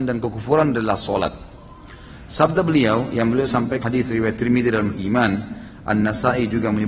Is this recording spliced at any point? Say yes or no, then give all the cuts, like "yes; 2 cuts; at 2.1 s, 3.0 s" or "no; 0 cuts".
yes; 2 cuts; at 3.8 s, 4.9 s